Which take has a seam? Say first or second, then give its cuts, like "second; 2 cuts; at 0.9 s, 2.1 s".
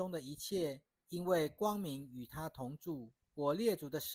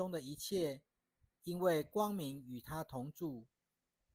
first; 2 cuts; at 0.9 s, 3.2 s